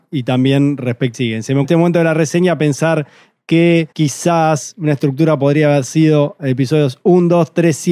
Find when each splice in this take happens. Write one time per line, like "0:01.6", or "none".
0:01.1
0:01.6
0:03.9